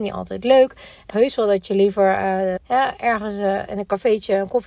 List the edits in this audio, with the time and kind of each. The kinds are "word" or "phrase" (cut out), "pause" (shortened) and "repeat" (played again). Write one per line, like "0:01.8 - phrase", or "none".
0:01.1 - phrase
0:02.6 - word

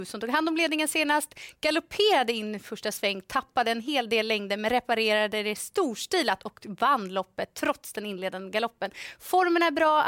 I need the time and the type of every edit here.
none

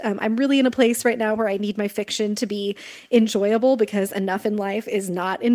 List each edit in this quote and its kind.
none

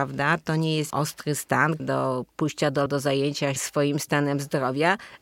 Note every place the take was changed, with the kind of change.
0:00.9 - word
0:01.8 - phrase
0:02.9 - word
0:03.6 - word

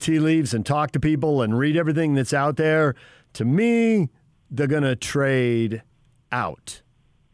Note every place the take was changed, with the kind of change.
none

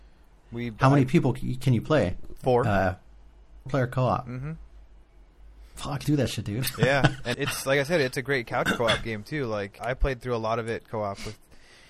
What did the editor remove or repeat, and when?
0:03.7 - word
0:06.0 - word
0:07.3 - word
0:09.8 - word
0:10.9 - word

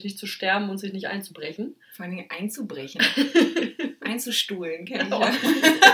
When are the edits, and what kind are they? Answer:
0:01.8 - pause

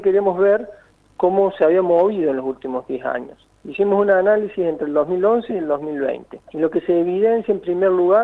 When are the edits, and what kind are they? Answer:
0:03.6 - pause
0:06.4 - pause

